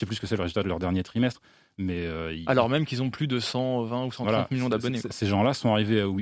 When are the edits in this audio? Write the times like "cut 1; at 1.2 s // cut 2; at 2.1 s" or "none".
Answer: none